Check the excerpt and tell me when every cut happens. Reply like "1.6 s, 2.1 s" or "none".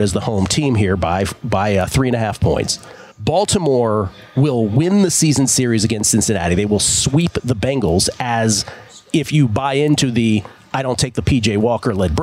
3.1 s

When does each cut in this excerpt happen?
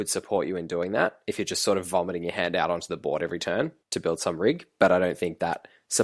3.8 s

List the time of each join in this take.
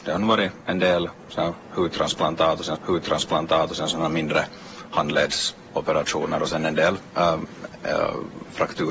2.7 s

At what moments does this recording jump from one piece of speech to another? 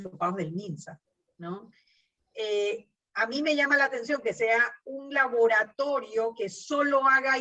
none

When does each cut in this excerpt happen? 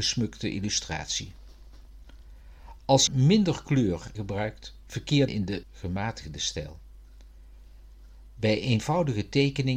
3.1 s, 4.1 s, 5.3 s, 5.6 s

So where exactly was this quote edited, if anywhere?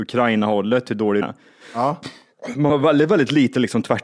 1.2 s, 2.7 s

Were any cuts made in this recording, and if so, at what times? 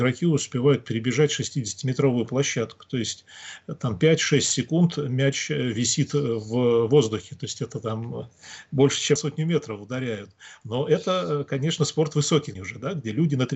9.2 s, 12.5 s

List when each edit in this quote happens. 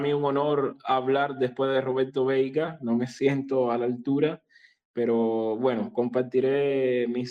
none

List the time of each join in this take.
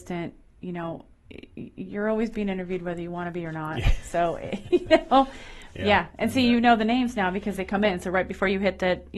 none

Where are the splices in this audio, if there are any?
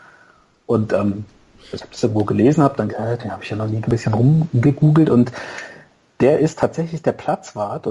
2.9 s, 3.8 s

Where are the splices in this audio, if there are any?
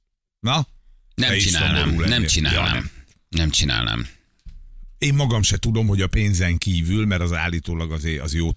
none

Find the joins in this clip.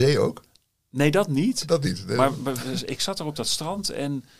none

